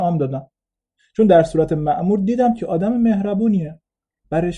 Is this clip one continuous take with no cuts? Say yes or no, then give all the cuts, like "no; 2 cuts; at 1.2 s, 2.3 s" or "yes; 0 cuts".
yes; 0 cuts